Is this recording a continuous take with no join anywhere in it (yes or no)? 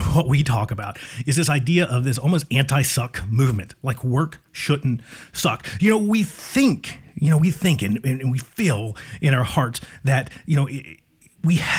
yes